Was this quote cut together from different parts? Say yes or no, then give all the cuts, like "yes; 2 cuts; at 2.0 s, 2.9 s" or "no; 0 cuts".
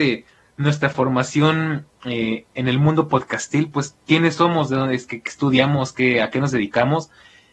no; 0 cuts